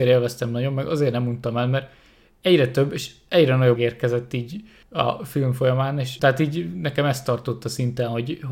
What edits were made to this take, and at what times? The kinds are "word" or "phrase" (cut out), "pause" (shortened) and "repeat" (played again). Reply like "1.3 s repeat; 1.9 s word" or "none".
3.7 s word

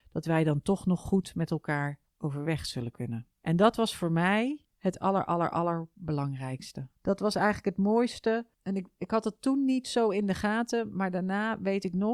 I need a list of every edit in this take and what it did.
2.1 s pause; 3.3 s pause; 4.6 s pause; 7.0 s pause

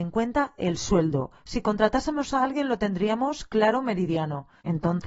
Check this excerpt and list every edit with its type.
none

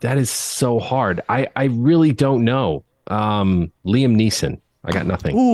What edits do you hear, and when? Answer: 3.8 s pause

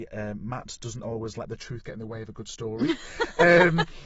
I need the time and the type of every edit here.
none

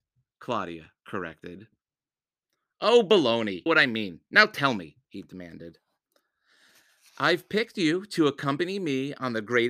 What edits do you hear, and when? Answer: 3.7 s phrase; 5.0 s pause

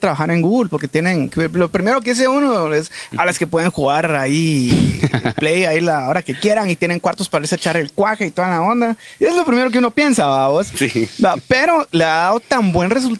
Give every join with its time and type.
11.9 s word

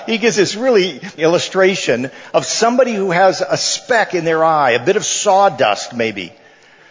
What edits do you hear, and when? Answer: 1.2 s word

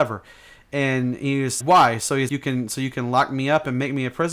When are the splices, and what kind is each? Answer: 1.6 s word; 2.3 s word

